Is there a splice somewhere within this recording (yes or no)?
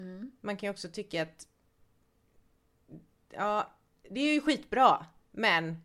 no